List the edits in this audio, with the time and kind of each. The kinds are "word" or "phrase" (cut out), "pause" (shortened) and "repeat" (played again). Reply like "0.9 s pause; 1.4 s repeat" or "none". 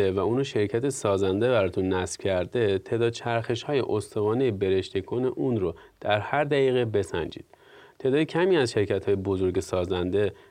none